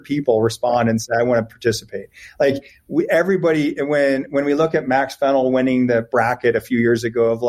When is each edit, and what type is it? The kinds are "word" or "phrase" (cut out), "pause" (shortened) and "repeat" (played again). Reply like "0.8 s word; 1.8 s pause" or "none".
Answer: none